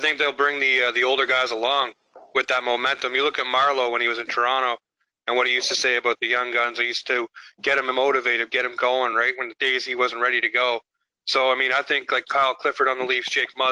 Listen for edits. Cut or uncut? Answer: uncut